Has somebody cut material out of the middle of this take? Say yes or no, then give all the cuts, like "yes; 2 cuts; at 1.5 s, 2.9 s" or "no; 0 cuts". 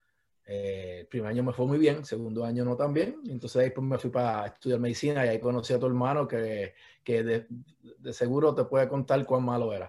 no; 0 cuts